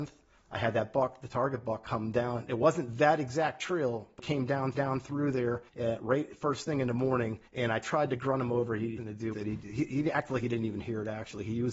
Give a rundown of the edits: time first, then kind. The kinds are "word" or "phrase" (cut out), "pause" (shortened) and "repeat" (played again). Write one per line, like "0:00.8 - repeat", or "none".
0:04.2 - word
0:04.7 - repeat
0:05.7 - pause
0:07.5 - pause
0:09.0 - phrase
0:09.3 - word